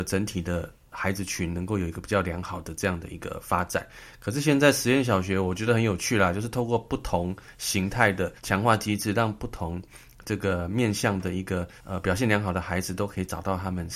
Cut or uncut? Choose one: cut